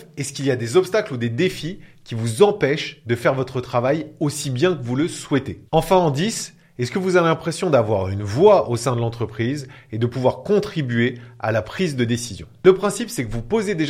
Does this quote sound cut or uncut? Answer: cut